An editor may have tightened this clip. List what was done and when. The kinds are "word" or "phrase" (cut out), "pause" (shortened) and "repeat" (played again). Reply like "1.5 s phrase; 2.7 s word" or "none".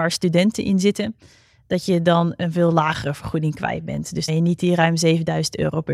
4.3 s phrase